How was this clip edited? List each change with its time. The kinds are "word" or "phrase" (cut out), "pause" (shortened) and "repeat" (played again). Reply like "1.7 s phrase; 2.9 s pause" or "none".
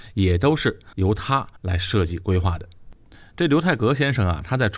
0.9 s pause; 1.6 s pause